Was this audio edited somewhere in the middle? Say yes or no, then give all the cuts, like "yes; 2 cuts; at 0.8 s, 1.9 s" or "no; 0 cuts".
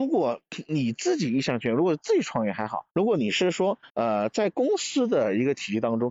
yes; 2 cuts; at 2.9 s, 3.9 s